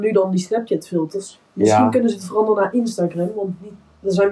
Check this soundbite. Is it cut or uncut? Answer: uncut